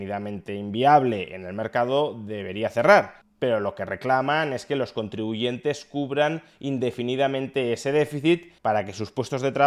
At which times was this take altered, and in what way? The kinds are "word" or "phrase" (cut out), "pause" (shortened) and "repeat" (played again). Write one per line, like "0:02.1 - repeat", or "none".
0:08.6 - pause